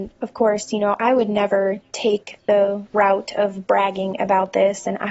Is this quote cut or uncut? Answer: uncut